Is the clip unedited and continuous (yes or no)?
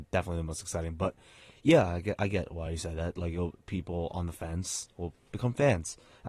yes